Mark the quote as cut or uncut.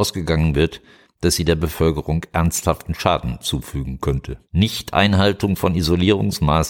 cut